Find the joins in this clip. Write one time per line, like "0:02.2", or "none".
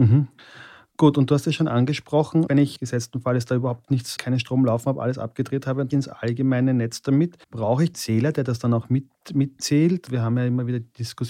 0:02.5
0:04.2
0:05.9
0:07.4
0:07.9